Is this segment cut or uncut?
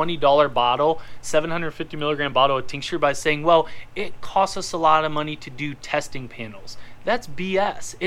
uncut